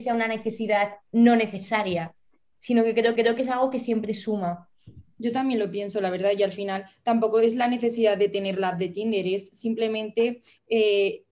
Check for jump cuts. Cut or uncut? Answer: cut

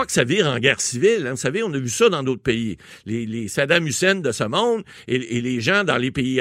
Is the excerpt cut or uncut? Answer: uncut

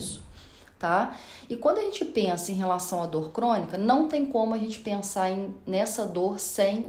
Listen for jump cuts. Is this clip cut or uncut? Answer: uncut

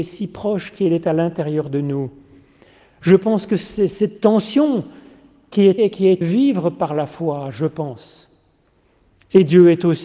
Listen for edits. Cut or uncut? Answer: cut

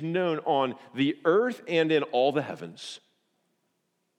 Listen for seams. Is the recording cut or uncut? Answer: uncut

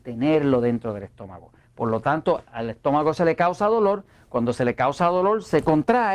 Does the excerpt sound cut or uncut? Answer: uncut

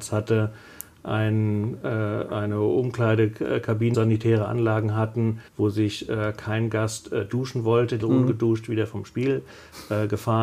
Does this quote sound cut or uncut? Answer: cut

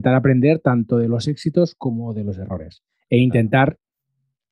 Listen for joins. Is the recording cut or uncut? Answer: uncut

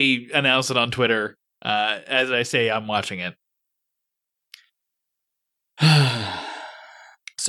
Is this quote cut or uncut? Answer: uncut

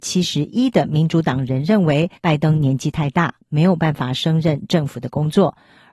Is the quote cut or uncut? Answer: cut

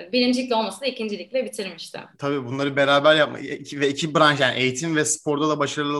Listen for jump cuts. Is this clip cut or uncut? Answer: cut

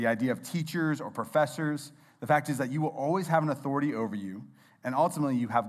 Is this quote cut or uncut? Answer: uncut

